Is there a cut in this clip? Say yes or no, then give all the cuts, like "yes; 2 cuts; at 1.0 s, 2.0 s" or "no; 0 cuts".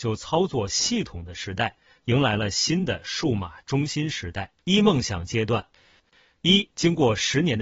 yes; 1 cut; at 4.6 s